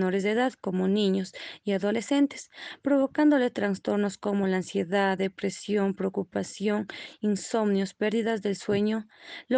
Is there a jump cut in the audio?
no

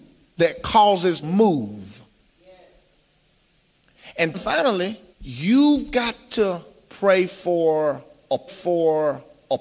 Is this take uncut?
no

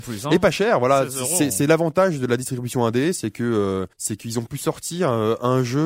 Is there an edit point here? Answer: yes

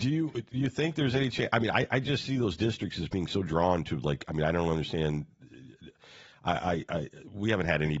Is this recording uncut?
yes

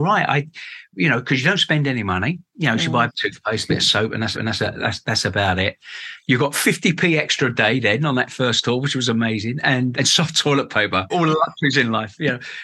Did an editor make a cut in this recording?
yes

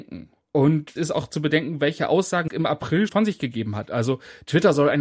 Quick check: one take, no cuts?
no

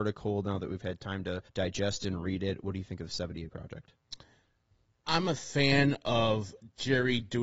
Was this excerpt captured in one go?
no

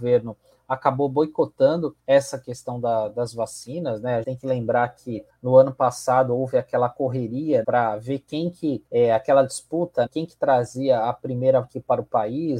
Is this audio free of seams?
no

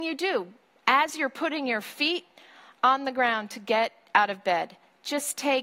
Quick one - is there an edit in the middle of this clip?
no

